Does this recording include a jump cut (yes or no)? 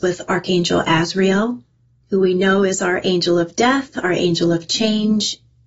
no